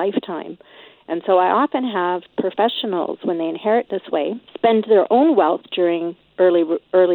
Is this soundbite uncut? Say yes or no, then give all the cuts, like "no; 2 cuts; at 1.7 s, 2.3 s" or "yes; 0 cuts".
no; 1 cut; at 4.5 s